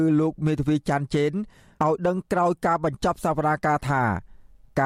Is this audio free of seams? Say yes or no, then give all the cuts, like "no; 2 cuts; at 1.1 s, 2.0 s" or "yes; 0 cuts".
yes; 0 cuts